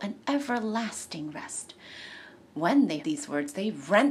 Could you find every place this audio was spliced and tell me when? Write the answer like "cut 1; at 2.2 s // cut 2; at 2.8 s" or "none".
cut 1; at 3.0 s